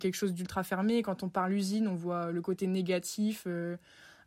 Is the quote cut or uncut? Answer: uncut